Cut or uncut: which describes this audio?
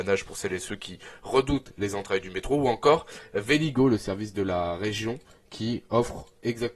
uncut